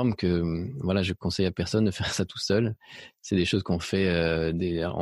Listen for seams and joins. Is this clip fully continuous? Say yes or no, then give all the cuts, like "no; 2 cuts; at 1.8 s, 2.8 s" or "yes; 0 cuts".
yes; 0 cuts